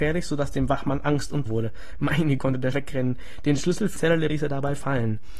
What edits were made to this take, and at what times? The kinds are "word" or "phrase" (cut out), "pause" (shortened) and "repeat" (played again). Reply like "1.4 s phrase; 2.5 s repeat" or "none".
1.5 s word; 2.4 s word; 2.7 s word; 4.0 s word; 4.3 s word